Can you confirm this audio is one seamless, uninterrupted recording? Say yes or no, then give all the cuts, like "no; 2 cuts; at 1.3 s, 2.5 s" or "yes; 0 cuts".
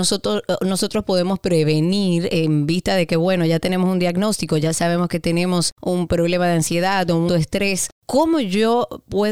no; 1 cut; at 7.3 s